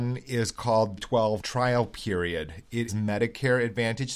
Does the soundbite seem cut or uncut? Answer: cut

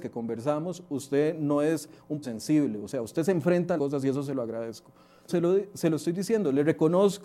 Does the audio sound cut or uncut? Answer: cut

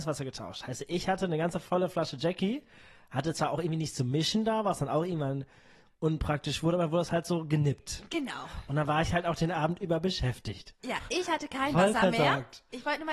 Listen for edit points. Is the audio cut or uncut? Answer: uncut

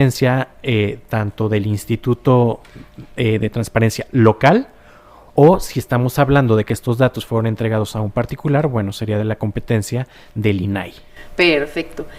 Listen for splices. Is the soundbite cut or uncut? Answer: uncut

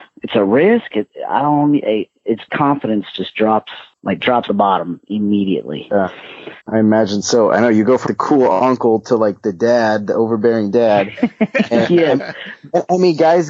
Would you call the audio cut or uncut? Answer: cut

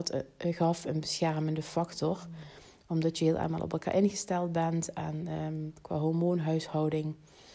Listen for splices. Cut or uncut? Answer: uncut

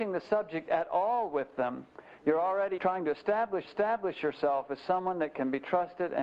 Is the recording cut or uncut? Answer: cut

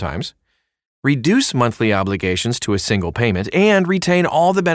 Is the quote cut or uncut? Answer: uncut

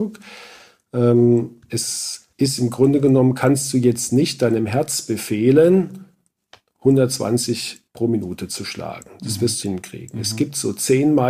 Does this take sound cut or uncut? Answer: cut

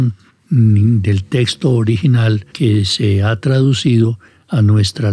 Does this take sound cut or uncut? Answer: cut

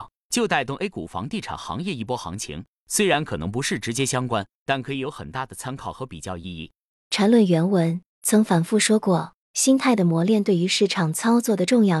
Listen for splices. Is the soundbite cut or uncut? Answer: cut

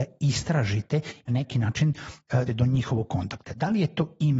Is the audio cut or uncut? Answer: cut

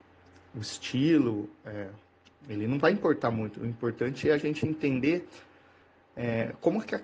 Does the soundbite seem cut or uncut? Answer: uncut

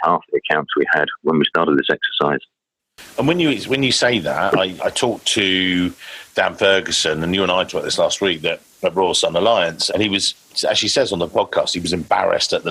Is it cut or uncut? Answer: cut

